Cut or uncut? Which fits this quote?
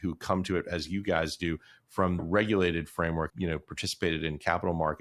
cut